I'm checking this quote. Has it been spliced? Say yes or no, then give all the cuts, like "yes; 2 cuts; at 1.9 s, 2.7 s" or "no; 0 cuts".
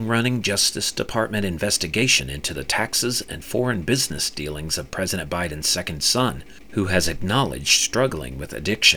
no; 0 cuts